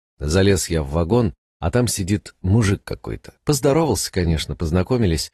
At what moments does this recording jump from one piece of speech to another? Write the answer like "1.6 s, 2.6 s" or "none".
3.4 s